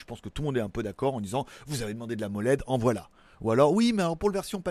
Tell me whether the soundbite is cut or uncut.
uncut